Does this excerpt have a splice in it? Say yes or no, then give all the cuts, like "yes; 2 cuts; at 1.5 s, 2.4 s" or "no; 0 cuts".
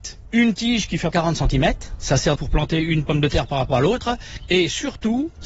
yes; 2 cuts; at 1.1 s, 2.4 s